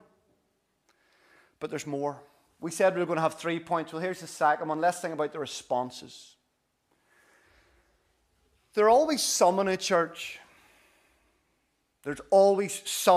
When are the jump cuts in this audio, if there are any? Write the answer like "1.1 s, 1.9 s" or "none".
none